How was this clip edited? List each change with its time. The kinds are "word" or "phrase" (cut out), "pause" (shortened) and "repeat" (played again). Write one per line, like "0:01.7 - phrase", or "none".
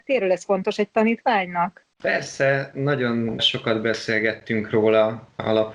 0:01.9 - pause